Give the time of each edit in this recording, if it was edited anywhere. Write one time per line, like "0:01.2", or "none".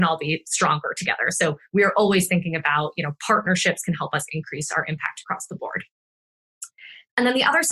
none